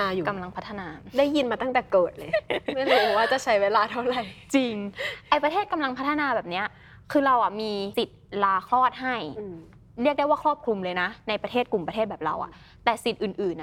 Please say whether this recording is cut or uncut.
uncut